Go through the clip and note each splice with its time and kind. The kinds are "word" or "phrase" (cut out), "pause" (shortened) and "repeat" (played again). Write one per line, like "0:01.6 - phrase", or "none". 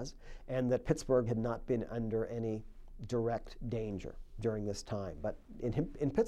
0:01.3 - word

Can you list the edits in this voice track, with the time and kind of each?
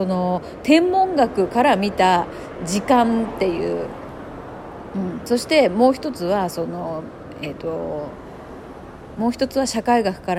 none

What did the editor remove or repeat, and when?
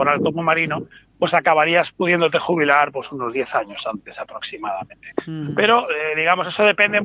none

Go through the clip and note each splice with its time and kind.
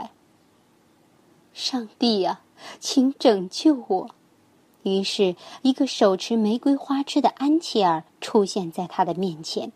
0:04.2 - pause
0:08.1 - pause

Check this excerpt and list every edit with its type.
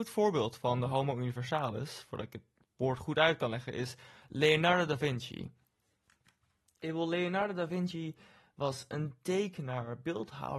none

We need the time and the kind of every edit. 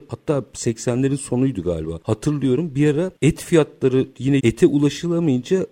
0:04.4 - word

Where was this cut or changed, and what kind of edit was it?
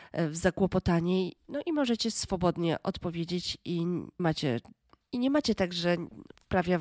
0:01.4 - word
0:04.2 - word

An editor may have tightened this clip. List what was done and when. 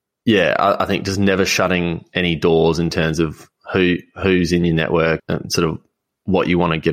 0:05.2 - word

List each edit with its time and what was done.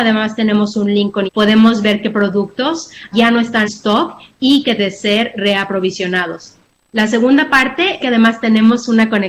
0:01.3 - word
0:03.1 - word
0:03.6 - word
0:04.8 - word
0:08.0 - word

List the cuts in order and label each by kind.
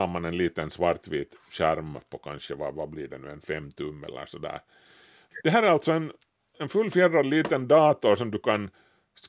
none

